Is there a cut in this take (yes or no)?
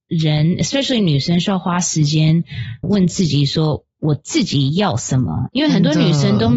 yes